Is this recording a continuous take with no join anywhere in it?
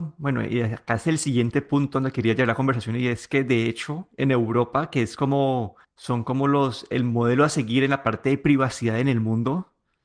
no; 1 cut; at 5.8 s

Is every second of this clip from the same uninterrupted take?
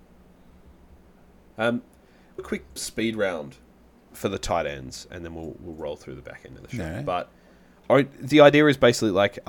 no; 2 cuts; at 2.4 s, 2.8 s

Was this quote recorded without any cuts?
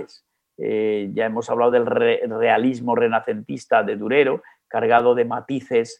yes; 0 cuts

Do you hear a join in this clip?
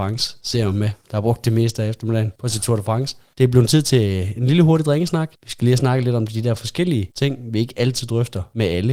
no; 0 cuts

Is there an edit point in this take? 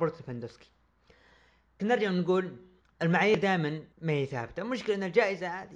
yes; 3 cuts; at 1.8 s, 2.8 s, 3.9 s

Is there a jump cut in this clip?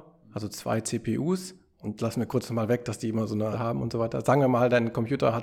yes; 2 cuts; at 2.0 s, 3.5 s

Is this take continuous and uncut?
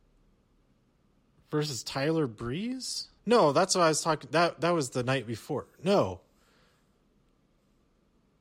no; 1 cut; at 3.2 s

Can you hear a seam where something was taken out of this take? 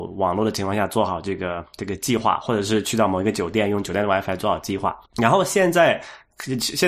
yes; 1 cut; at 5.0 s

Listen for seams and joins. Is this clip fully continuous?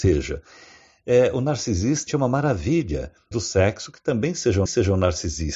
no; 3 cuts; at 2.1 s, 3.3 s, 4.7 s

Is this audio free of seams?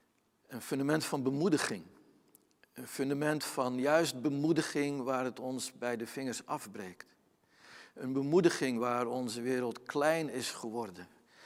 yes; 0 cuts

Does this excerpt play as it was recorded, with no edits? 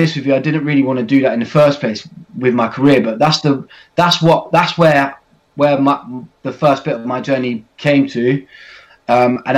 yes; 0 cuts

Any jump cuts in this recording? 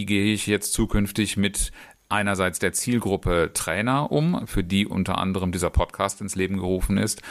no; 0 cuts

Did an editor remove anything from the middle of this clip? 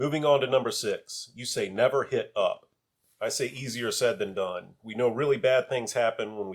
no; 0 cuts

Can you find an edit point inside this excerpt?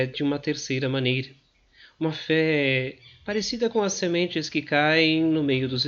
no; 0 cuts

